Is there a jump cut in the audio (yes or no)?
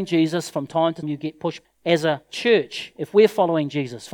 yes